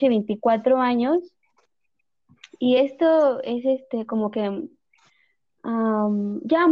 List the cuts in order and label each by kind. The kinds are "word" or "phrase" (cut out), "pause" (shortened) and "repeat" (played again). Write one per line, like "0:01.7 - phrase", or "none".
none